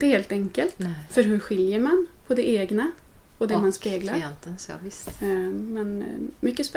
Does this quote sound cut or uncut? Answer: uncut